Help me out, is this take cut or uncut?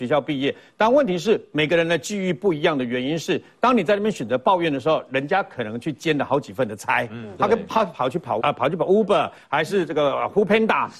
cut